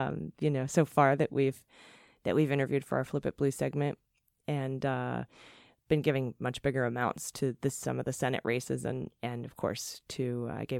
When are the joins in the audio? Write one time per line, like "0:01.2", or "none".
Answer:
none